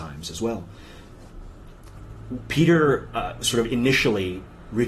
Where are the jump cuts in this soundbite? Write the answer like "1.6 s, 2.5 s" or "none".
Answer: none